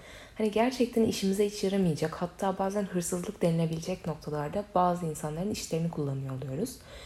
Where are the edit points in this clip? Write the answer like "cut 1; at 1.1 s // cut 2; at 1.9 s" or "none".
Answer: none